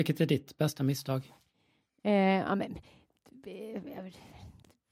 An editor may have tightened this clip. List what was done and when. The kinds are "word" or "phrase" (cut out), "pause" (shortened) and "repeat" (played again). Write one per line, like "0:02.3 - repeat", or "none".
none